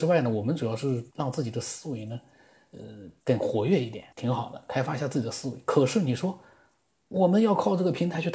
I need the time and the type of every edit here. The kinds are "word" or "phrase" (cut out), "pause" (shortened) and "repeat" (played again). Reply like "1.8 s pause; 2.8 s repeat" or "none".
1.1 s pause; 3.2 s pause; 4.1 s pause